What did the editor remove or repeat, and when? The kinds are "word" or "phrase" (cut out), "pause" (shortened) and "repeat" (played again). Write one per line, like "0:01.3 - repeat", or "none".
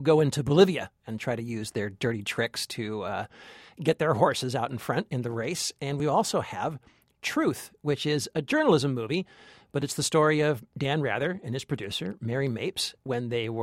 none

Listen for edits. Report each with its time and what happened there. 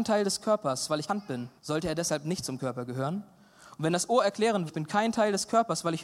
0:01.1 - word
0:01.6 - pause
0:04.7 - word

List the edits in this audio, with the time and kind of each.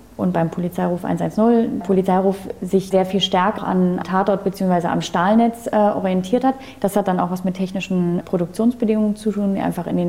0:01.8 - word
0:02.9 - word
0:03.6 - word
0:04.0 - word
0:08.2 - word

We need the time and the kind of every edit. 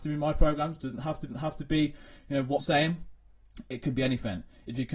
0:01.3 - repeat
0:02.6 - word

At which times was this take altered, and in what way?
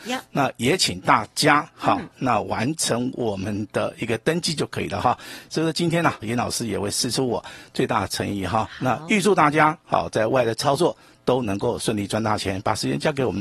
0:06.2 - word

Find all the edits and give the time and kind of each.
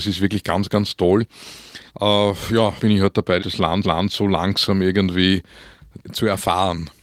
0:01.9 - pause
0:02.8 - word
0:03.4 - word
0:03.8 - repeat
0:06.0 - word

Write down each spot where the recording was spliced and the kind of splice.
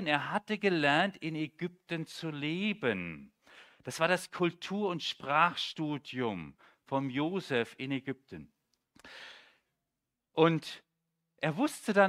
none

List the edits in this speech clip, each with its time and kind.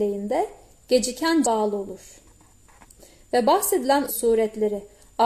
0:01.4 - word
0:04.1 - word

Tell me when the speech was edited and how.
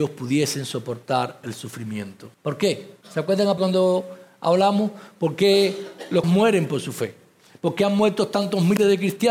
0:02.3 - pause
0:03.0 - pause
0:03.6 - word
0:06.2 - word

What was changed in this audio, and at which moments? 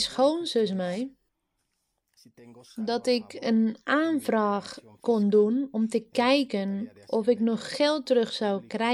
none

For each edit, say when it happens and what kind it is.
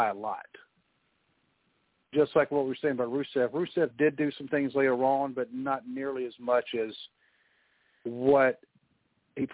none

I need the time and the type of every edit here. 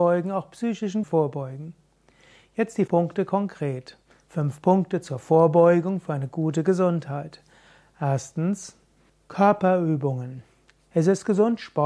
0:01.0 - word
0:02.9 - word
0:09.1 - pause

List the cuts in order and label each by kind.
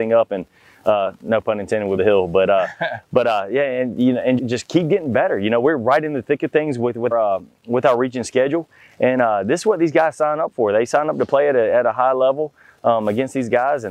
0:02.0 - word
0:04.4 - word
0:07.1 - word

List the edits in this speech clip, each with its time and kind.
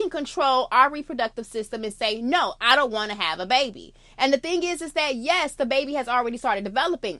none

